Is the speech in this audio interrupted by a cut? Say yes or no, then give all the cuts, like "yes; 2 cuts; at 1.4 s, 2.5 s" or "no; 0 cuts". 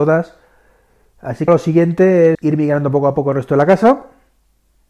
yes; 2 cuts; at 1.5 s, 2.3 s